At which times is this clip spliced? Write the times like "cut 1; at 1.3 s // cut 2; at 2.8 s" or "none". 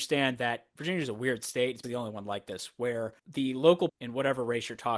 cut 1; at 1.8 s // cut 2; at 3.2 s // cut 3; at 3.9 s